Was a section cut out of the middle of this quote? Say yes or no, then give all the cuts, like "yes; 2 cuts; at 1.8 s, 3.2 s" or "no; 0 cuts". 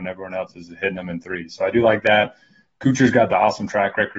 no; 0 cuts